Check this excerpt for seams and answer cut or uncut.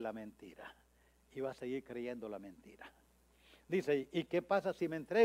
uncut